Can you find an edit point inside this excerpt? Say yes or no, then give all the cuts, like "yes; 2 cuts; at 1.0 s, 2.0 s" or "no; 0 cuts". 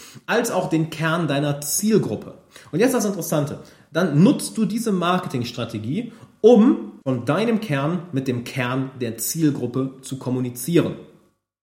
yes; 1 cut; at 7.0 s